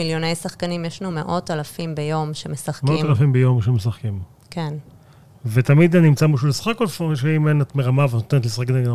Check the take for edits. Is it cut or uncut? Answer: uncut